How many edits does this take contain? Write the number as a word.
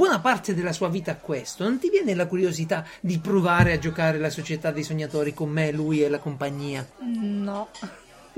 one